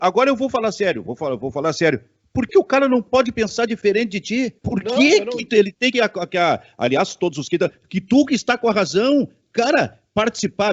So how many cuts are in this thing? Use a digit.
3